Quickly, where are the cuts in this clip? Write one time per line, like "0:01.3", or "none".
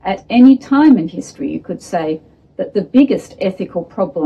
none